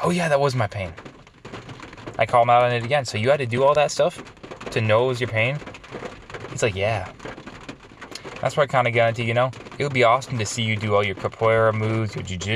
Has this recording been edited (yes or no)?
no